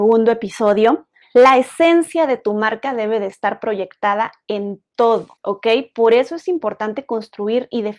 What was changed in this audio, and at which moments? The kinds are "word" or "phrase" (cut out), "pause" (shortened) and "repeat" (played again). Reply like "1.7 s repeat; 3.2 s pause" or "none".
1.2 s pause; 5.4 s pause